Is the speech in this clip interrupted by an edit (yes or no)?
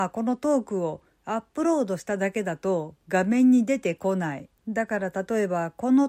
yes